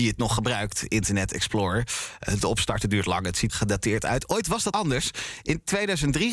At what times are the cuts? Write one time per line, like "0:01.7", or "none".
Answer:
0:03.5
0:04.7